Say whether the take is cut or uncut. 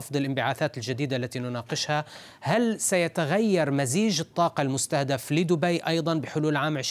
uncut